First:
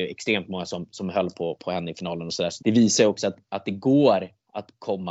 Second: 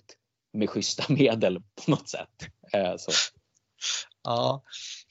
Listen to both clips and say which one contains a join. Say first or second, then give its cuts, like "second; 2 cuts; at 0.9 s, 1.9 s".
first; 1 cut; at 2.6 s